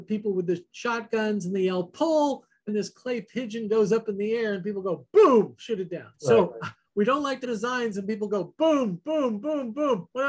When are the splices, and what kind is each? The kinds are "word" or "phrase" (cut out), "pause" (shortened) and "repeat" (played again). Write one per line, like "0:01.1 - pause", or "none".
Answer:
0:02.7 - word
0:06.1 - pause
0:07.4 - phrase